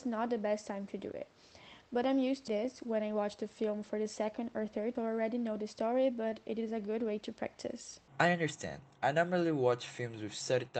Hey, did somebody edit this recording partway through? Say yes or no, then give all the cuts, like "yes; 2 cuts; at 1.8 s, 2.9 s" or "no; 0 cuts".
yes; 3 cuts; at 2.5 s, 4.9 s, 8.1 s